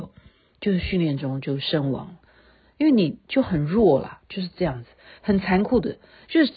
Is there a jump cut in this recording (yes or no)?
no